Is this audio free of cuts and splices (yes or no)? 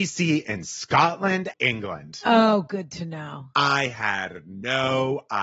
no